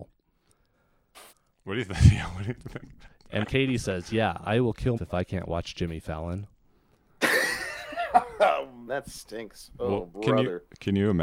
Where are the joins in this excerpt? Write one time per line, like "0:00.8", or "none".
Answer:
0:01.3
0:03.4
0:05.0
0:08.9
0:10.1